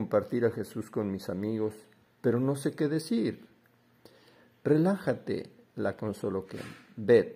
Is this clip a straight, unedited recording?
yes; 0 cuts

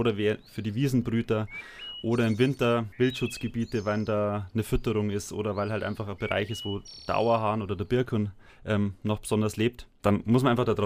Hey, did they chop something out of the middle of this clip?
yes; 2 cuts; at 2.9 s, 8.5 s

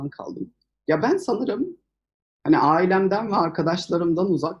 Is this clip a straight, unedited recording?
yes; 0 cuts

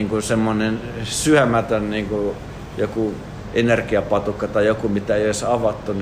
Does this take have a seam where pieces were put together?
no; 0 cuts

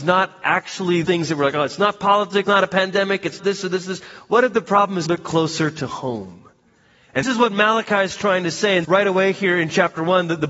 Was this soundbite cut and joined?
yes; 6 cuts; at 1.0 s, 2.4 s, 3.4 s, 5.1 s, 7.2 s, 8.8 s

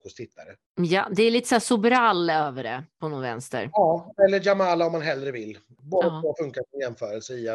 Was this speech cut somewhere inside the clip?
no; 0 cuts

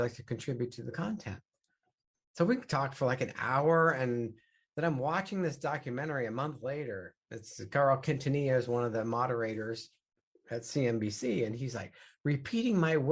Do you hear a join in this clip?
no; 0 cuts

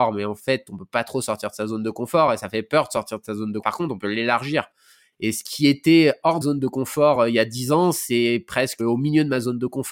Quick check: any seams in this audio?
yes; 3 cuts; at 3.6 s, 6.4 s, 8.8 s

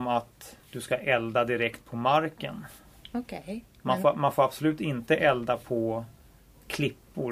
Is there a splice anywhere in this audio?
no; 0 cuts

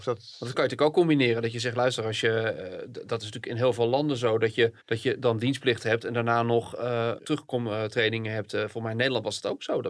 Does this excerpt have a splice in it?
yes; 2 cuts; at 4.8 s, 7.2 s

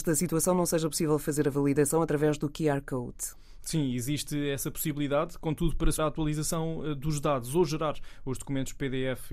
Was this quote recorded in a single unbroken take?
no; 1 cut; at 6.0 s

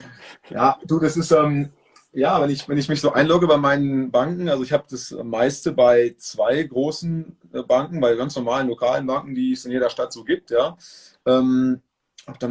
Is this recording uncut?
yes; 0 cuts

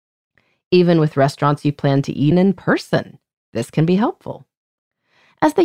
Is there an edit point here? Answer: yes; 1 cut; at 2.3 s

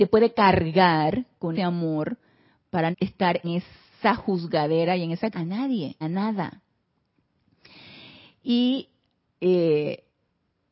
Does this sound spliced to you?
yes; 5 cuts; at 1.5 s, 2.9 s, 3.4 s, 5.3 s, 6.0 s

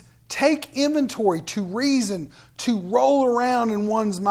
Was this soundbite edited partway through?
no; 0 cuts

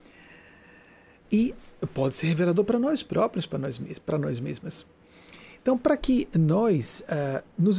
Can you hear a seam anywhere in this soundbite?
no; 0 cuts

